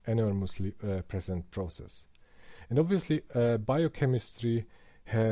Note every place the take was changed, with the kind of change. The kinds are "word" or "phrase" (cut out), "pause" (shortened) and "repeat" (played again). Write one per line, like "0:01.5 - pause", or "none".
none

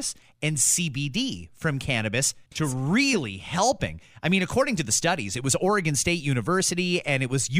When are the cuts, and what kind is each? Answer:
0:02.5 - pause

